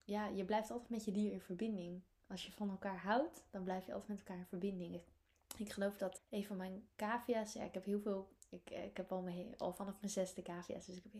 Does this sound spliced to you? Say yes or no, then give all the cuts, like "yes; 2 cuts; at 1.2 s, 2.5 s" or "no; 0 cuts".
yes; 1 cut; at 6.2 s